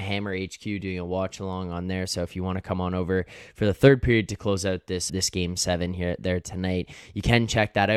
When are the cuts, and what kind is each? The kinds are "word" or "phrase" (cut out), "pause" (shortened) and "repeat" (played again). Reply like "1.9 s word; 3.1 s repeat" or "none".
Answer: 5.1 s word